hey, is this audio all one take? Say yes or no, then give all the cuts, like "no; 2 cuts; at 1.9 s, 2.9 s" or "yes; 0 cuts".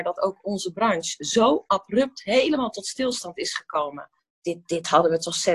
no; 1 cut; at 4.2 s